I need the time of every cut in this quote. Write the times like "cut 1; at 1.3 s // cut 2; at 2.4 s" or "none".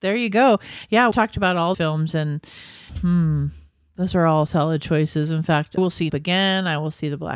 cut 1; at 1.1 s // cut 2; at 1.7 s // cut 3; at 2.9 s // cut 4; at 4.5 s // cut 5; at 5.8 s // cut 6; at 6.1 s